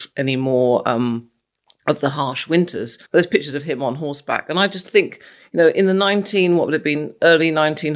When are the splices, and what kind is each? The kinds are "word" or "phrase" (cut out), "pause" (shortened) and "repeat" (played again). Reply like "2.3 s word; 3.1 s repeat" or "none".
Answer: 3.1 s pause